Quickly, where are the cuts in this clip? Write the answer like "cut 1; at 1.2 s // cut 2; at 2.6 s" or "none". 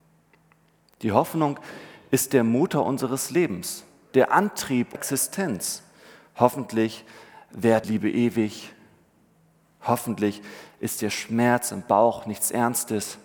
cut 1; at 4.9 s // cut 2; at 7.8 s